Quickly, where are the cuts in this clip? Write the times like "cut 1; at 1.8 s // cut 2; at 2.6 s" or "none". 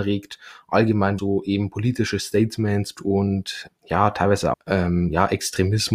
cut 1; at 1.2 s // cut 2; at 3.0 s // cut 3; at 3.7 s // cut 4; at 4.5 s